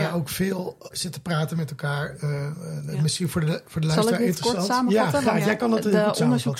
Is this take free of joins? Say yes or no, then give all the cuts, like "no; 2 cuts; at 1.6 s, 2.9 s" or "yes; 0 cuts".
no; 1 cut; at 0.9 s